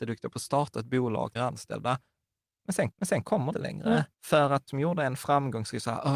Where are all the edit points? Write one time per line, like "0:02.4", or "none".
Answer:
0:01.4
0:02.9
0:03.5
0:04.1
0:04.7